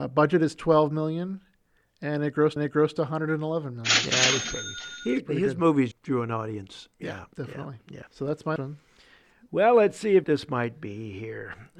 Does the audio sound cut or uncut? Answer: cut